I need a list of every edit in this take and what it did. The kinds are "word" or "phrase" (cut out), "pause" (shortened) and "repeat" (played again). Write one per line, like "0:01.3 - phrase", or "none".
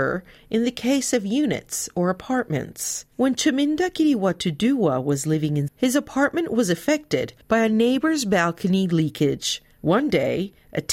0:03.1 - pause
0:05.7 - word
0:07.4 - pause